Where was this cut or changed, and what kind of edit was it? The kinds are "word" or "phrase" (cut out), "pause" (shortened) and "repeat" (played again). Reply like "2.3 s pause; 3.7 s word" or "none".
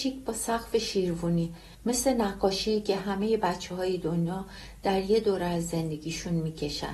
1.7 s pause